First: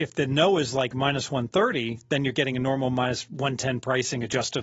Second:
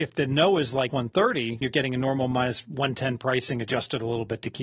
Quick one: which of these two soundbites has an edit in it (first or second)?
second